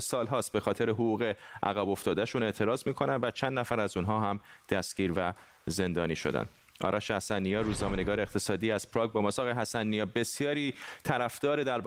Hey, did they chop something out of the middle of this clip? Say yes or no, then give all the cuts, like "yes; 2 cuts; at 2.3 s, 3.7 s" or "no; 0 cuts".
no; 0 cuts